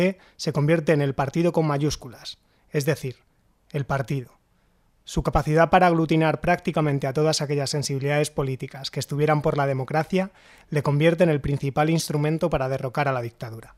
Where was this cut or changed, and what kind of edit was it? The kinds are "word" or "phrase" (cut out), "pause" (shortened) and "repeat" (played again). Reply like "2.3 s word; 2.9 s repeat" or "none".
none